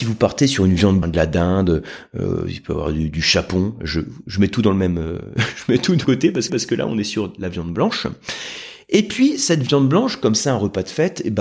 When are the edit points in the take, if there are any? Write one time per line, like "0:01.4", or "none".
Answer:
0:01.0
0:06.0
0:06.5